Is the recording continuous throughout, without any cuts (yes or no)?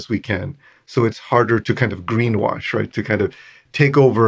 yes